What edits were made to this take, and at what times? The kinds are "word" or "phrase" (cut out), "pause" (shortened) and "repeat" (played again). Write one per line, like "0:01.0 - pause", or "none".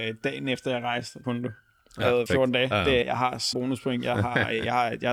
0:01.2 - word
0:02.3 - word
0:03.0 - word
0:03.5 - word